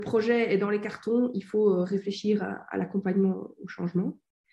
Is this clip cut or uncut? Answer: uncut